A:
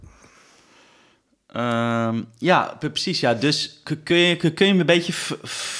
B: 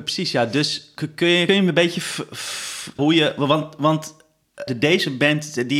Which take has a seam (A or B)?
B